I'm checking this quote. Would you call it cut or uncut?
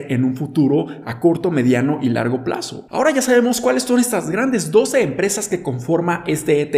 uncut